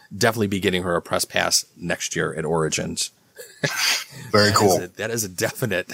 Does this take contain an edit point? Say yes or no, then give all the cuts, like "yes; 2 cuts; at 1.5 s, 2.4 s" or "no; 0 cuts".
no; 0 cuts